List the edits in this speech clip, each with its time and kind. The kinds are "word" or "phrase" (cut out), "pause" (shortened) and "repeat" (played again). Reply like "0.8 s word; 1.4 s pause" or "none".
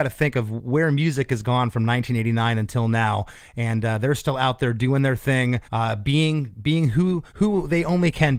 5.6 s pause; 7.3 s pause